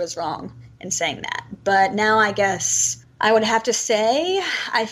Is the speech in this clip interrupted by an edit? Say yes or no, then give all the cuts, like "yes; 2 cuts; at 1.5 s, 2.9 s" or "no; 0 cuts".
no; 0 cuts